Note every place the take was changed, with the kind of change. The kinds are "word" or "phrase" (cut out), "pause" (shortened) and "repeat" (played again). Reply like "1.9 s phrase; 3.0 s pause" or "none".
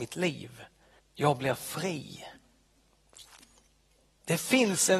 1.0 s pause